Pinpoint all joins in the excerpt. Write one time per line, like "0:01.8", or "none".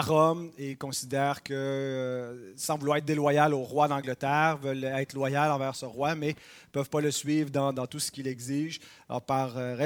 none